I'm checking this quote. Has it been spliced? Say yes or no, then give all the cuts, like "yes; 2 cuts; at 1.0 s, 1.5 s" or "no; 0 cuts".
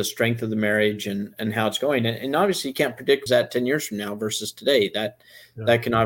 yes; 1 cut; at 3.3 s